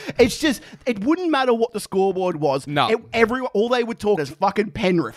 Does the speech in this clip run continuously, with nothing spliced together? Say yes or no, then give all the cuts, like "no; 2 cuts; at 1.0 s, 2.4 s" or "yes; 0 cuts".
no; 1 cut; at 4.2 s